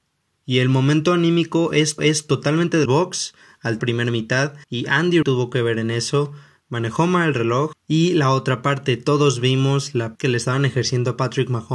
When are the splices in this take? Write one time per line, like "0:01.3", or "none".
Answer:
0:02.0
0:02.9
0:03.8
0:04.6
0:05.2
0:10.1